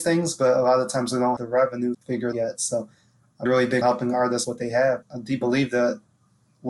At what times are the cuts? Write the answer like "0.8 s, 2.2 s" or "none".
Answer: 1.4 s, 1.9 s, 2.3 s, 3.5 s, 3.8 s, 4.4 s, 5.0 s, 5.4 s